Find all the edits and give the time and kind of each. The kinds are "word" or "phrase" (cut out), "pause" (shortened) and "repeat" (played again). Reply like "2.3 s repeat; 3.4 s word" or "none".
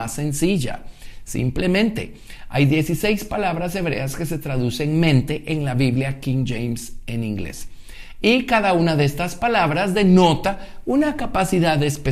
none